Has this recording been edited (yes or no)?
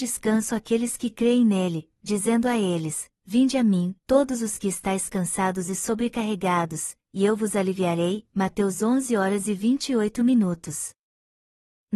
yes